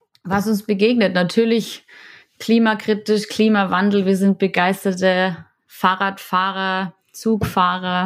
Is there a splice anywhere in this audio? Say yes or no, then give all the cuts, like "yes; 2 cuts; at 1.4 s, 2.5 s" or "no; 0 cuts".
no; 0 cuts